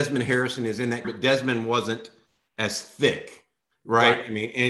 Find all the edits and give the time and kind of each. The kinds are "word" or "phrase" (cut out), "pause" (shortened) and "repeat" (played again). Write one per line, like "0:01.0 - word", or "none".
0:01.0 - word

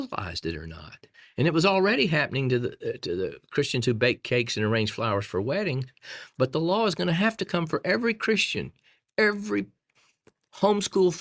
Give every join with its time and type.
0:01.1 - pause

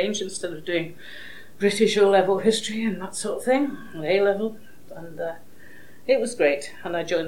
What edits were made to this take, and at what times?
none

